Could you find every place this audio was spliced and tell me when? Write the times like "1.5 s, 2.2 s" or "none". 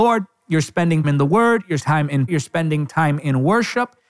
1.0 s, 1.8 s, 2.3 s